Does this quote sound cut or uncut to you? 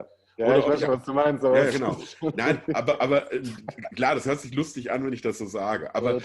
uncut